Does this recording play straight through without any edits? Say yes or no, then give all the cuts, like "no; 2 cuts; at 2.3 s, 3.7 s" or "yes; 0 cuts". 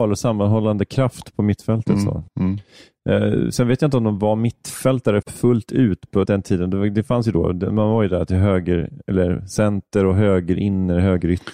no; 3 cuts; at 2.3 s, 5.2 s, 6.3 s